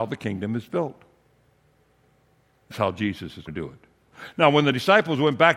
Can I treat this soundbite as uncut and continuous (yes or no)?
no